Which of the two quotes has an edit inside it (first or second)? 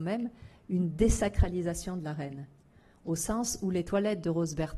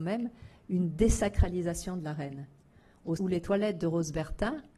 second